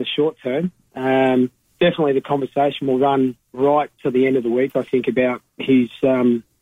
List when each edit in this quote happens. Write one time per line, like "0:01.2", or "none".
0:01.7